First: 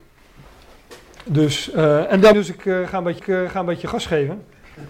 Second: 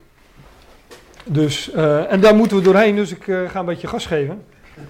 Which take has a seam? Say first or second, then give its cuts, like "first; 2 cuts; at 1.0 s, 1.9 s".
first; 2 cuts; at 2.3 s, 3.2 s